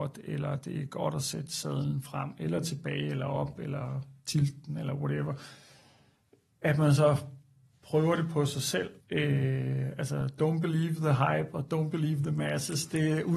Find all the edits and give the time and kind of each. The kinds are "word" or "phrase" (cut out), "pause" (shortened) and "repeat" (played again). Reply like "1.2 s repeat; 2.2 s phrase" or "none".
9.0 s pause